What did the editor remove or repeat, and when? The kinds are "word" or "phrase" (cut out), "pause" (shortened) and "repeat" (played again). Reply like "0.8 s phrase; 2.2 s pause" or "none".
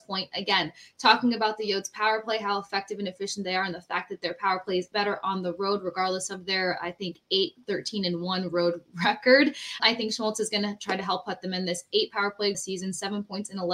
4.9 s word; 9.8 s word; 12.5 s phrase